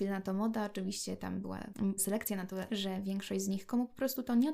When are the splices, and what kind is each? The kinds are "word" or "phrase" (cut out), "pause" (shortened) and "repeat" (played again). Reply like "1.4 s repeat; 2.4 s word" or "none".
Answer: 2.0 s word; 2.7 s word

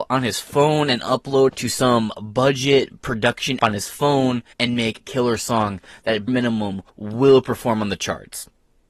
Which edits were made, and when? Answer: 1.5 s word; 3.6 s word; 4.5 s pause; 5.0 s word; 6.3 s word; 6.9 s pause

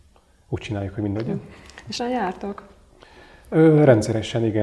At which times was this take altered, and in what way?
1.2 s word; 2.0 s word

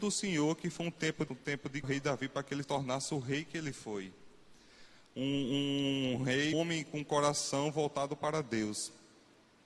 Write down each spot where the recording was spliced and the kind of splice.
1.3 s word; 1.8 s phrase; 2.6 s word; 6.5 s word

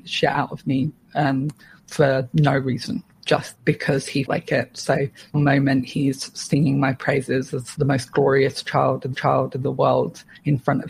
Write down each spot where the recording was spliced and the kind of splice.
3.5 s word; 4.3 s word; 5.3 s word; 7.7 s word; 9.1 s repeat

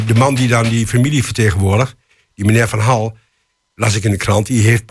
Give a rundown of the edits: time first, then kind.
none

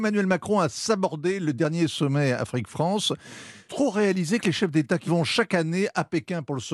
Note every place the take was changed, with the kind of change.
3.7 s word; 5.1 s word

